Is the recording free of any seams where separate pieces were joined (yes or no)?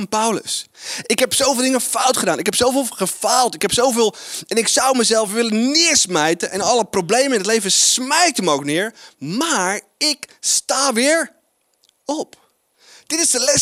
yes